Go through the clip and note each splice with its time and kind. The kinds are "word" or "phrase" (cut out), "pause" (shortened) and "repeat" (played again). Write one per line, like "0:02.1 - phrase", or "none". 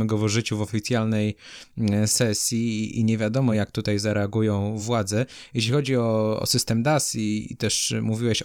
none